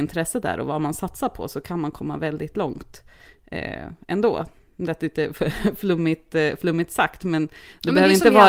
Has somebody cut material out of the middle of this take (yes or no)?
no